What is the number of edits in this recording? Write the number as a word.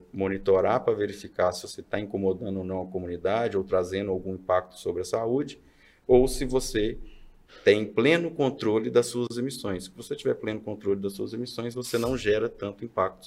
zero